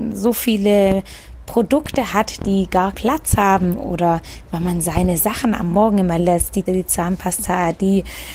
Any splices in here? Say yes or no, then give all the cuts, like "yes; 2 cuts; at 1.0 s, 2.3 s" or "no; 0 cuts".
yes; 3 cuts; at 2.9 s, 6.2 s, 6.7 s